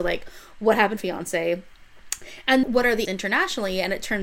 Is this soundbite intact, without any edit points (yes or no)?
no